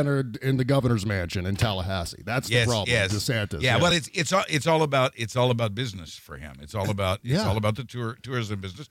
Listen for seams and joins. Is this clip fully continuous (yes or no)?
yes